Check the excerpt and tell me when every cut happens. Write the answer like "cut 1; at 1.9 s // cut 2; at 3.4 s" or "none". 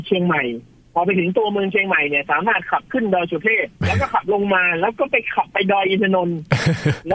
cut 1; at 3.8 s